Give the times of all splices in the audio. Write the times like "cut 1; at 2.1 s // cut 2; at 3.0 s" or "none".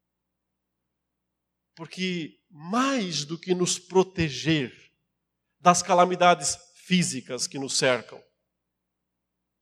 none